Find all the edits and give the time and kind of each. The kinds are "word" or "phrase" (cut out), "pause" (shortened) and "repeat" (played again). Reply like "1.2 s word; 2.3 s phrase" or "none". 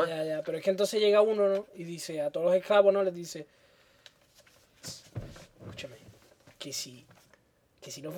none